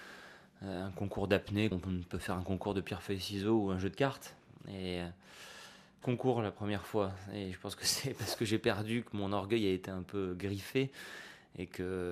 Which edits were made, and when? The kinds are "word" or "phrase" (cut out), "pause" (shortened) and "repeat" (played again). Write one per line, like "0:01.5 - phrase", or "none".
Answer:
0:01.7 - word
0:06.0 - phrase